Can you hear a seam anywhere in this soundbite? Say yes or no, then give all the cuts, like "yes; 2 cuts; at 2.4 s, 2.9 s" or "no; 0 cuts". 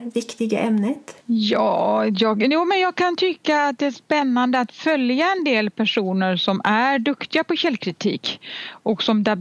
yes; 1 cut; at 1.2 s